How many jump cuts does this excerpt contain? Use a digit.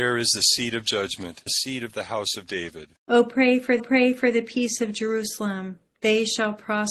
3